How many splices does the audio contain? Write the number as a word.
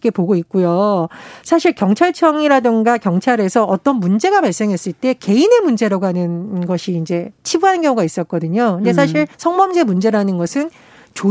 one